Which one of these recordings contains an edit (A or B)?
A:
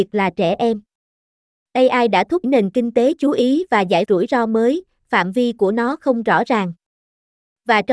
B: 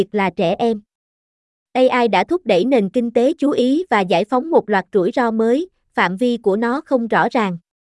A